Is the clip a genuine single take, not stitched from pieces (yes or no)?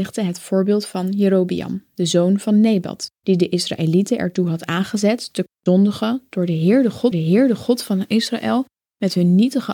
no